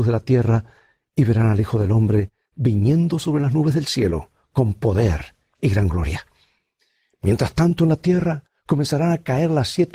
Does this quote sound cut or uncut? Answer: uncut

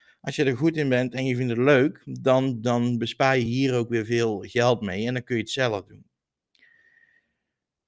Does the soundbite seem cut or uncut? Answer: uncut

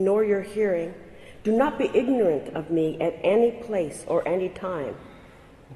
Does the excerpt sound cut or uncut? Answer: uncut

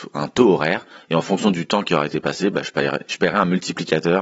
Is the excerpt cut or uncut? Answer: uncut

